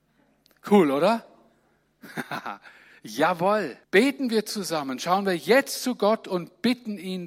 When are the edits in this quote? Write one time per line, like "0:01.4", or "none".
0:03.8